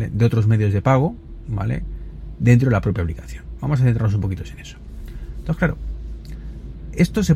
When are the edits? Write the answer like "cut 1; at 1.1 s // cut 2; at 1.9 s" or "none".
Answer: none